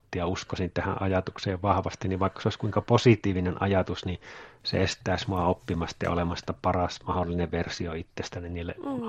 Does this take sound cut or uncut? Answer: uncut